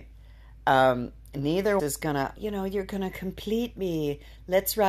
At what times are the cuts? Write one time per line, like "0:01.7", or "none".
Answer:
0:01.8
0:02.4